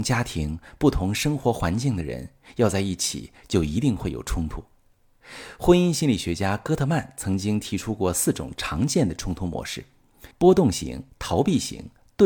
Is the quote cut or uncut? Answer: cut